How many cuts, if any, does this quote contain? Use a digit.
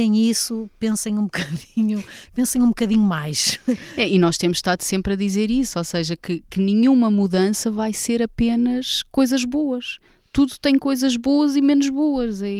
0